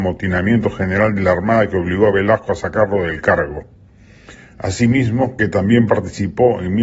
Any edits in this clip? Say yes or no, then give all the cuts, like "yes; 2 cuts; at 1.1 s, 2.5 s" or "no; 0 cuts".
no; 0 cuts